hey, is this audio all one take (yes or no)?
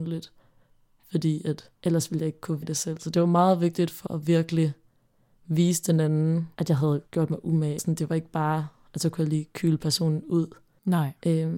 no